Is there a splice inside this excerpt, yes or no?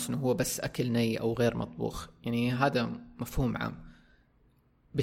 no